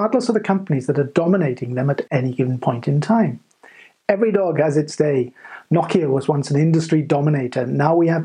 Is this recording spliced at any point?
no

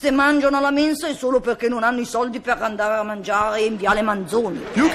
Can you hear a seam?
no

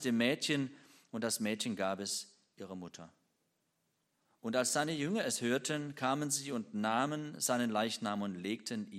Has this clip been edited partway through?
no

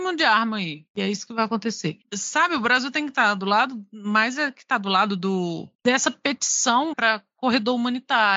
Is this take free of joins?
no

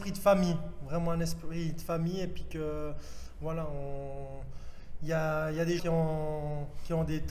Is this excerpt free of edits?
no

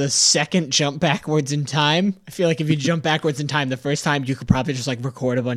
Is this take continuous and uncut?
yes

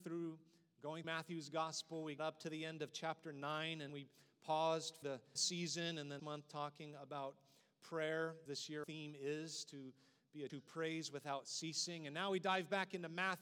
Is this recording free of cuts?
no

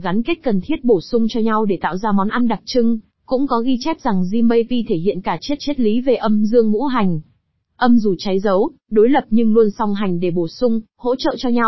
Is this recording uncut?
no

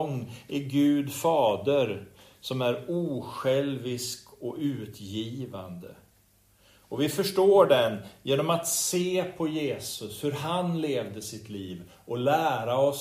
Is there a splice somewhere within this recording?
no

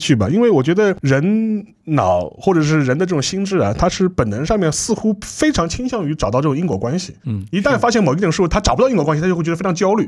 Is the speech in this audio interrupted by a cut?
yes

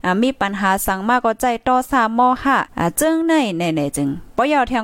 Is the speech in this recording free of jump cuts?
no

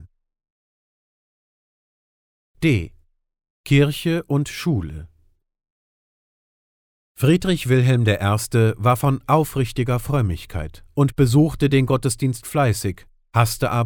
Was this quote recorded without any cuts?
yes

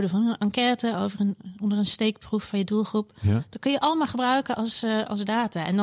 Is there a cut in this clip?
no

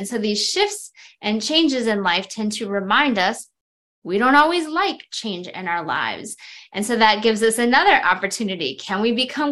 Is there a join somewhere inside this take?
no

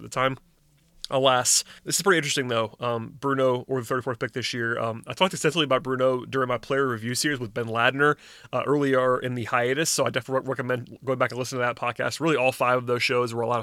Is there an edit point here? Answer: yes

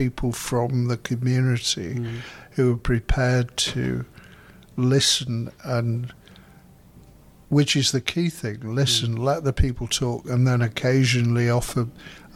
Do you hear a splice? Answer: no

